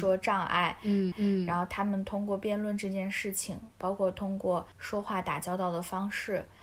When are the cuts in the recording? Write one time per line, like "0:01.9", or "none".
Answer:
0:01.1
0:03.7
0:04.7